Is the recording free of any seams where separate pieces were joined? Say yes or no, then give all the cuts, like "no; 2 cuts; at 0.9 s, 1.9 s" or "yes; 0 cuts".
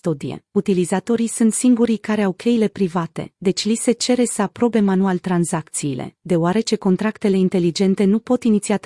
yes; 0 cuts